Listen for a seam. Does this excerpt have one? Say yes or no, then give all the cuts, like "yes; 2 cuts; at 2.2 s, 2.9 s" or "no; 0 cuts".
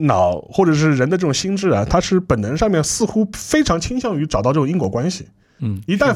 no; 0 cuts